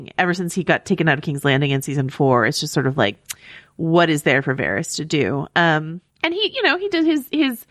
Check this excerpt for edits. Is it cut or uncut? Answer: cut